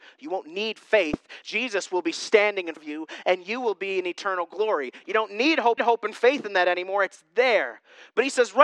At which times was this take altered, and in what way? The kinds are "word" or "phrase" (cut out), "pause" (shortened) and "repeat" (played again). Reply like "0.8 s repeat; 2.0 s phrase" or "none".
1.4 s word; 2.8 s word; 5.8 s repeat

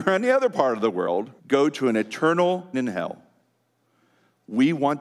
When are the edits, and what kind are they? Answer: 1.4 s pause; 2.7 s word

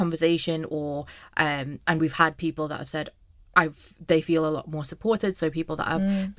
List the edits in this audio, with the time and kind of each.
none

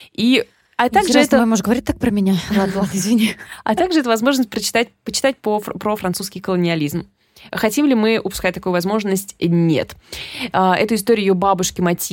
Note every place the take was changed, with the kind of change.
none

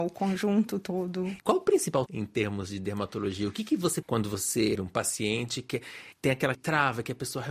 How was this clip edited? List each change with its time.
2.1 s word; 4.0 s word; 4.7 s word; 6.1 s pause; 6.5 s phrase

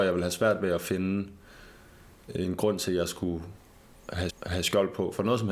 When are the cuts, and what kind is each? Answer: 4.3 s repeat

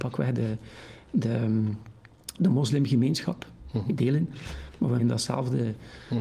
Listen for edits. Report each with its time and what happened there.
2.4 s word; 4.0 s phrase; 5.0 s phrase

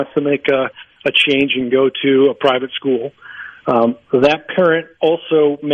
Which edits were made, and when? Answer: none

